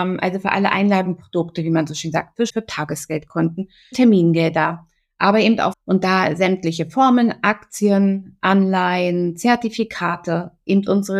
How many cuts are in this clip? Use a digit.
3